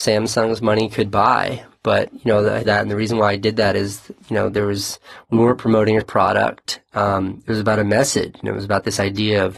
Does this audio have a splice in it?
yes; 2 cuts; at 2.6 s, 6.0 s

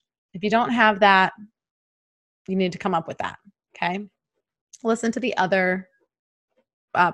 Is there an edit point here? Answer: no; 0 cuts

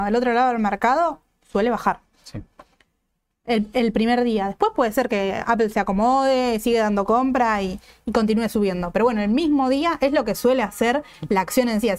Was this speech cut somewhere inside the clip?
no; 0 cuts

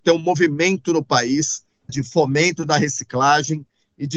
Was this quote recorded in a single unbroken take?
no; 1 cut; at 1.9 s

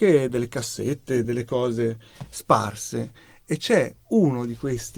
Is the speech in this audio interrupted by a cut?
no; 0 cuts

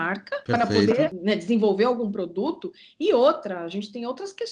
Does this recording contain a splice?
no; 0 cuts

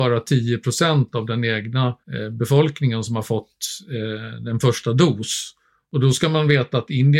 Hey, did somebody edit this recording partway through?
yes; 1 cut; at 2.0 s

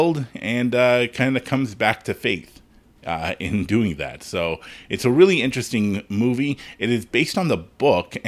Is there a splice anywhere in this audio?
no; 0 cuts

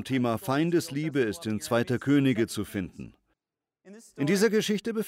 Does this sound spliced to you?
no; 0 cuts

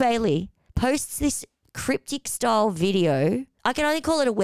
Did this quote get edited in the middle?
no; 0 cuts

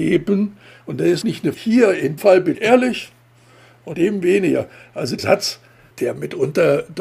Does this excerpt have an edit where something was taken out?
yes; 7 cuts; at 1.2 s, 1.5 s, 2.2 s, 2.5 s, 3.9 s, 5.2 s, 5.9 s

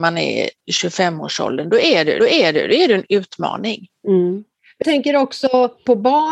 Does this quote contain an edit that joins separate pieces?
yes; 2 cuts; at 2.2 s, 4.8 s

